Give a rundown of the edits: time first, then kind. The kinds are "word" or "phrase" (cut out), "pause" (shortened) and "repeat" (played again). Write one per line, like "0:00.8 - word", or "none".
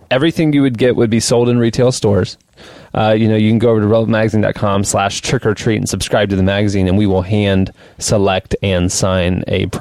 none